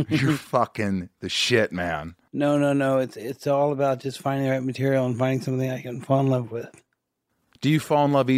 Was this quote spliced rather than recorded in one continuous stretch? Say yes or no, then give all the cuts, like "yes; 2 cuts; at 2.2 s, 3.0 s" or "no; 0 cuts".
no; 0 cuts